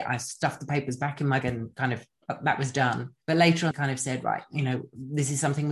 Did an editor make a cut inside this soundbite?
yes; 3 cuts; at 1.4 s, 3.2 s, 3.7 s

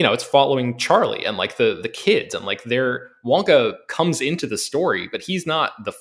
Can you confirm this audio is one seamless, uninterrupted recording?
yes; 0 cuts

